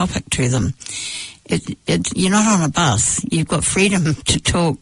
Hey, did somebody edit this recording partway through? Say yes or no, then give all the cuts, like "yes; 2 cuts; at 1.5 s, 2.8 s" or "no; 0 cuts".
no; 0 cuts